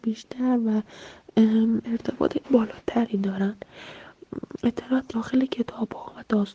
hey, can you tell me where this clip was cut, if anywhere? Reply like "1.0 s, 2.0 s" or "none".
1.8 s, 2.4 s, 5.1 s